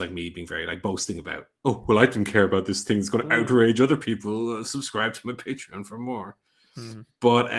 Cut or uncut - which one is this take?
uncut